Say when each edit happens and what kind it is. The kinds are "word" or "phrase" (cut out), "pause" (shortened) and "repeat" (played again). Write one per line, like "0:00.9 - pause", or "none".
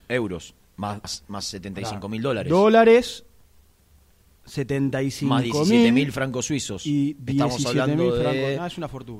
none

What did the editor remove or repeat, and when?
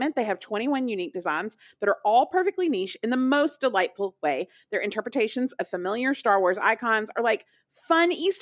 none

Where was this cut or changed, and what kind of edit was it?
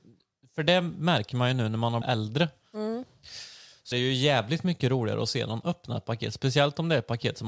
0:02.0 - word
0:03.9 - word
0:05.6 - word

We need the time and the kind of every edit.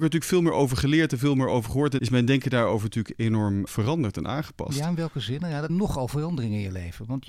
0:02.0 - word
0:03.7 - word
0:05.7 - word

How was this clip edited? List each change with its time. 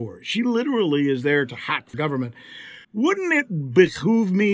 0:01.9 - word
0:02.8 - pause

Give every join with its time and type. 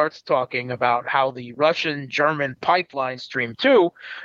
0:03.2 - word

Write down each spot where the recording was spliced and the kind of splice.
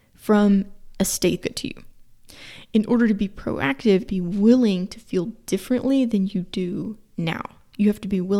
0:01.4 - phrase
0:04.1 - phrase

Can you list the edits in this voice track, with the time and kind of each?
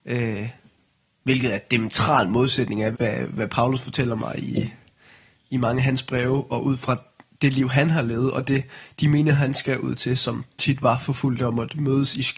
0:02.9 - word

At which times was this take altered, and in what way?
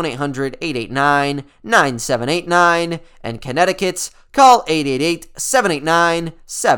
none

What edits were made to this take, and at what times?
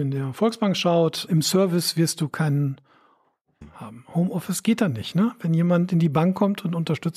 0:01.3 - word
0:03.6 - word

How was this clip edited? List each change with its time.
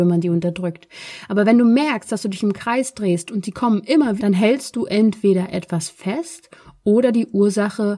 0:04.2 - word

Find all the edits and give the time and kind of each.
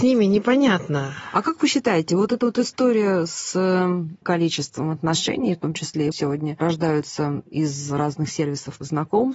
0:04.2 - word
0:06.1 - phrase

